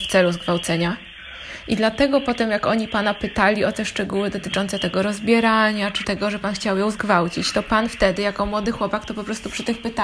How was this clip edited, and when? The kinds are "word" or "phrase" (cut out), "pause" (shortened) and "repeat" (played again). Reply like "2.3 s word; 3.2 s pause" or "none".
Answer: 6.0 s word